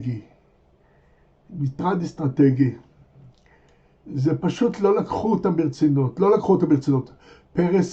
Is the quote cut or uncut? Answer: uncut